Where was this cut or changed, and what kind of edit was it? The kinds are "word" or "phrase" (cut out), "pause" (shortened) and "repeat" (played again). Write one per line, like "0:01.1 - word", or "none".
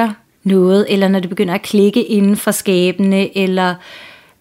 none